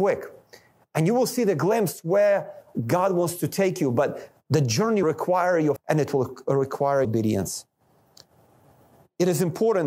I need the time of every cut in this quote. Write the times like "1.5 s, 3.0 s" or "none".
4.4 s, 5.0 s, 5.8 s, 7.0 s